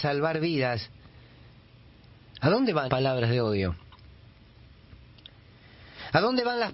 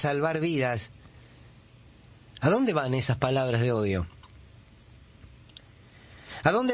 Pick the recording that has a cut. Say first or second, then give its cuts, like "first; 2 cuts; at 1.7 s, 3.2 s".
first; 1 cut; at 2.9 s